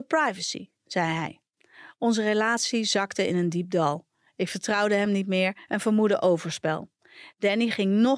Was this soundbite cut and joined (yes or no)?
no